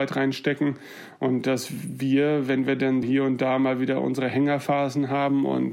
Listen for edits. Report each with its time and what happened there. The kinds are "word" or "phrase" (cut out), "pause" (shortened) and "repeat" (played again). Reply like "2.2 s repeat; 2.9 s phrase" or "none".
3.0 s word